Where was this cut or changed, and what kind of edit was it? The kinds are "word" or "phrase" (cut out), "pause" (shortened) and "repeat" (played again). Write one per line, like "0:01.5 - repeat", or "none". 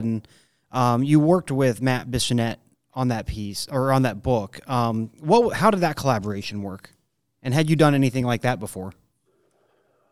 none